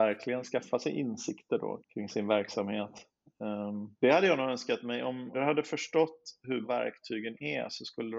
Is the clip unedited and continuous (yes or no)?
no